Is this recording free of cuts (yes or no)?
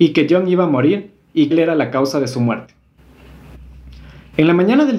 no